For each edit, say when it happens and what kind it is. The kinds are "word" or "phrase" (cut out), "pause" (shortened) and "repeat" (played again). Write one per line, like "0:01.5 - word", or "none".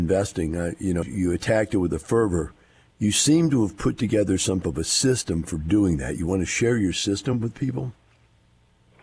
0:01.0 - word
0:04.6 - word